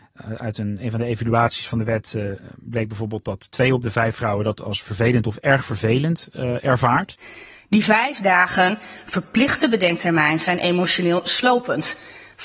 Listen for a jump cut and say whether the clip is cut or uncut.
uncut